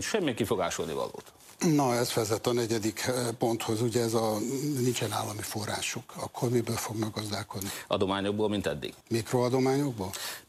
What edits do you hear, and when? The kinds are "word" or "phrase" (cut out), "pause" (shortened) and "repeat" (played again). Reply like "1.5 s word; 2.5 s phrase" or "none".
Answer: 9.0 s pause